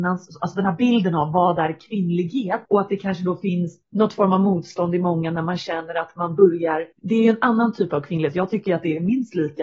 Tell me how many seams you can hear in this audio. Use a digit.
3